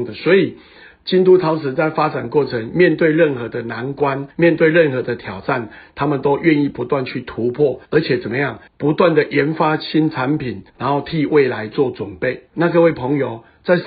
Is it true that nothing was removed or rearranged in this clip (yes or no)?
no